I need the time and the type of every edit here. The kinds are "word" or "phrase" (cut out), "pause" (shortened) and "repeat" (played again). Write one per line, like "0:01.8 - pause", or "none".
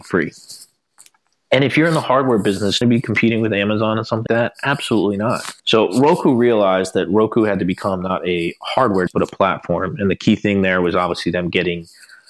0:02.8 - phrase
0:04.3 - word
0:05.6 - pause
0:09.1 - word